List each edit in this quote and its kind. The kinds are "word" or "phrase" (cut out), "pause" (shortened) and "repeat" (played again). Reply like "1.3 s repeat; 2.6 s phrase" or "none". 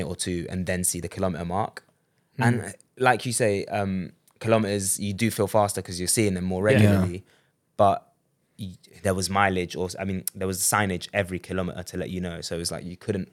none